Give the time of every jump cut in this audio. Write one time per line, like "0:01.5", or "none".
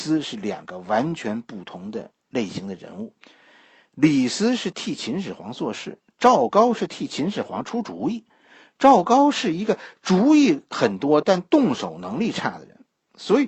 0:02.2